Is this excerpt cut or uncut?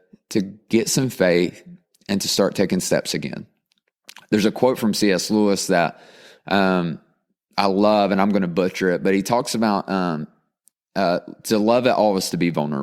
uncut